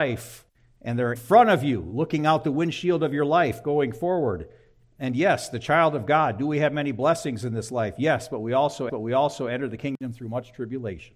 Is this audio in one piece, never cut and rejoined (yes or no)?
no